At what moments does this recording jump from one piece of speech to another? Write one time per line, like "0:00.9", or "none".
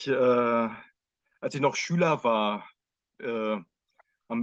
none